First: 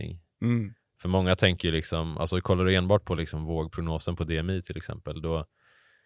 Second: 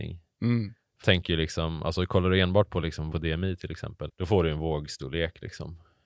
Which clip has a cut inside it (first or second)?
second